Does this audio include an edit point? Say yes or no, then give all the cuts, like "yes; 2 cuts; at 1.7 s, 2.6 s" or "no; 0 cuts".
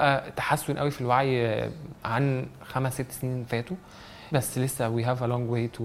yes; 1 cut; at 4.3 s